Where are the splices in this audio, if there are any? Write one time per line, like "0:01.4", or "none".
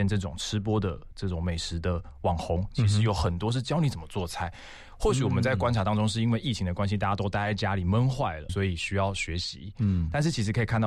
0:08.5